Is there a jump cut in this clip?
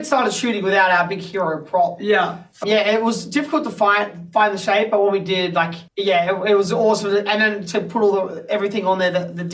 yes; 2 cuts; at 2.6 s, 5.9 s

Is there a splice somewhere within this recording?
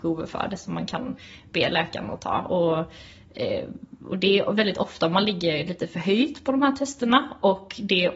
no; 0 cuts

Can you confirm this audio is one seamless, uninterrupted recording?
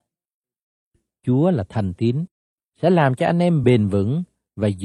yes; 0 cuts

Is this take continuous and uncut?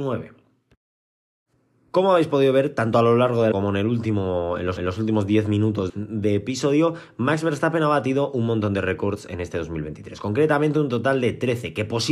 no; 3 cuts; at 3.5 s, 4.8 s, 5.9 s

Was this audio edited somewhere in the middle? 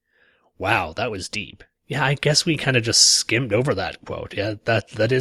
yes; 1 cut; at 1.8 s

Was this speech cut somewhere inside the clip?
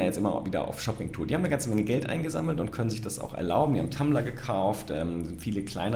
no; 0 cuts

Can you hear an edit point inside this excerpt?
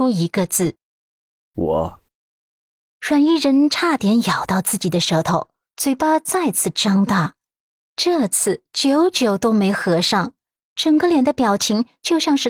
no; 0 cuts

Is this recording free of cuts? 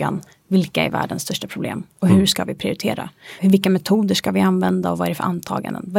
no; 1 cut; at 3.4 s

